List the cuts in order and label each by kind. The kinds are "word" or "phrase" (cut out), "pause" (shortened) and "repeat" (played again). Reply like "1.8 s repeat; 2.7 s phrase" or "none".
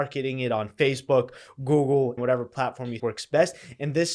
2.2 s word; 3.0 s word